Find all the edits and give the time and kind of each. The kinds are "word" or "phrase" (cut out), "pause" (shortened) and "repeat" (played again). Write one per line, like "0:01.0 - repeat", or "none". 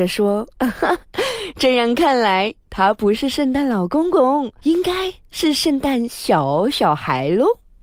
0:04.6 - pause